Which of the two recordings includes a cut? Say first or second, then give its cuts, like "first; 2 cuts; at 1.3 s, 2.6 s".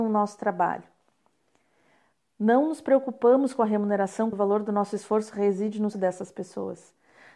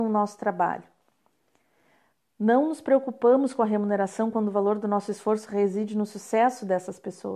first; 2 cuts; at 4.3 s, 5.9 s